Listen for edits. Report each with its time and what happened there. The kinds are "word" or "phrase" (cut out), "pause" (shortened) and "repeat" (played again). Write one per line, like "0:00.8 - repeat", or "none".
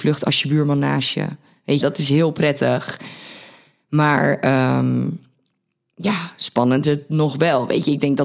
0:01.8 - word
0:06.8 - word